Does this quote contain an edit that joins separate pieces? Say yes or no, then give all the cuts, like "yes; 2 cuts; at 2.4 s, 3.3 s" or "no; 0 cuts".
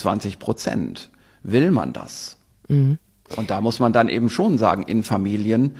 no; 0 cuts